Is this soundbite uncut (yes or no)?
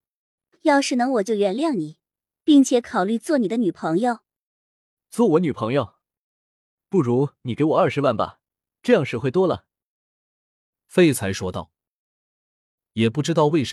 yes